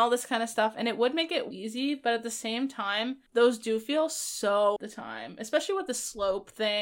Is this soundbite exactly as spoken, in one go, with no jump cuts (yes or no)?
no